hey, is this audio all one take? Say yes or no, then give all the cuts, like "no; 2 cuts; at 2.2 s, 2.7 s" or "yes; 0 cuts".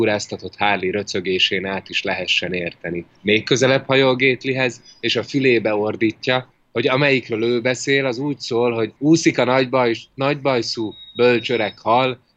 no; 3 cuts; at 3.2 s, 6.5 s, 9.0 s